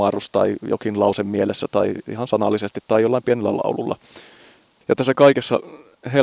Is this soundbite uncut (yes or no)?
yes